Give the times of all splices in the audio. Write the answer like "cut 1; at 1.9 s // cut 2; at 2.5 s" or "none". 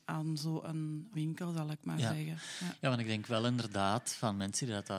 cut 1; at 1.1 s